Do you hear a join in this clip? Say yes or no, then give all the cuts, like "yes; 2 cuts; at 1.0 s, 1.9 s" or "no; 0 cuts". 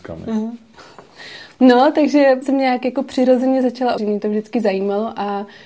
yes; 2 cuts; at 2.4 s, 4.0 s